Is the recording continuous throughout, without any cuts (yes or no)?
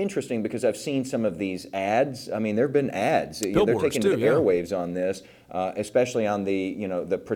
yes